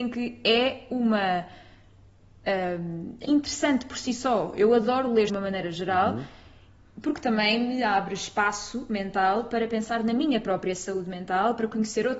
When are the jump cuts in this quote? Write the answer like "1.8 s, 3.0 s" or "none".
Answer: 3.2 s, 5.3 s